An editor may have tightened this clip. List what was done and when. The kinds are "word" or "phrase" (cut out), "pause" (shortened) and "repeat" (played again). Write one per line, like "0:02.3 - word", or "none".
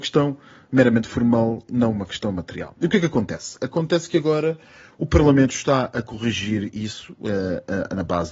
none